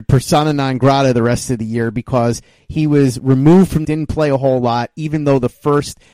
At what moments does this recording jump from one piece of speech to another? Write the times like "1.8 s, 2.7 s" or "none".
3.8 s